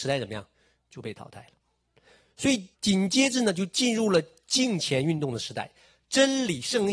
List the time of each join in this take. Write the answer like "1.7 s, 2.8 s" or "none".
2.7 s

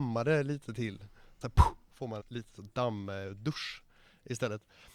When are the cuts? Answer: 1.4 s, 2.2 s

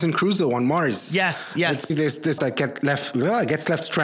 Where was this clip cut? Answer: 1.9 s, 2.4 s, 2.8 s

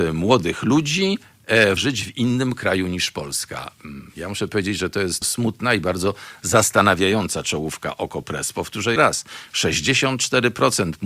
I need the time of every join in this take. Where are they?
1.8 s, 5.2 s, 9.0 s

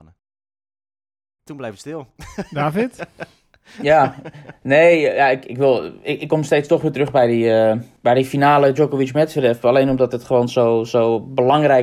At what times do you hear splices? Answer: none

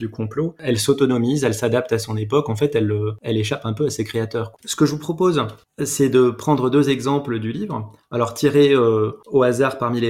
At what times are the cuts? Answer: 4.6 s

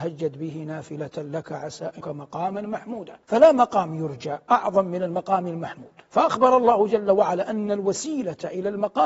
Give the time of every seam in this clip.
2.0 s, 3.2 s, 4.4 s, 6.0 s

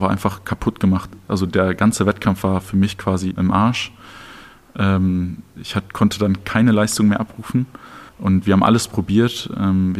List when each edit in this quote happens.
3.3 s, 8.1 s

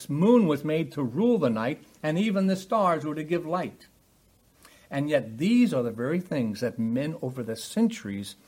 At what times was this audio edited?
none

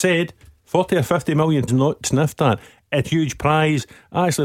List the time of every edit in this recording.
1.7 s, 2.0 s, 3.0 s

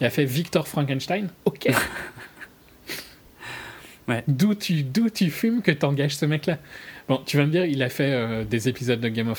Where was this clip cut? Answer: 1.4 s

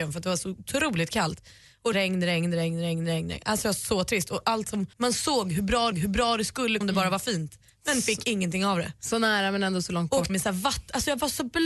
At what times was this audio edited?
1.9 s, 4.9 s, 5.9 s, 6.8 s, 10.3 s

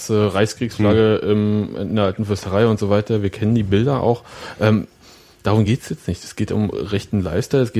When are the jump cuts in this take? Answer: none

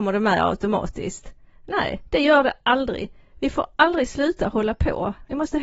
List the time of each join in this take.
none

